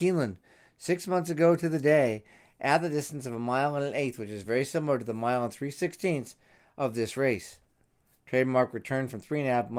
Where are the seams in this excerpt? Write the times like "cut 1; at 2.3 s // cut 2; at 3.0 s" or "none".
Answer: none